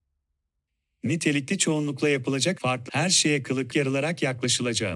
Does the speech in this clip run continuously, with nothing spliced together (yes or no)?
no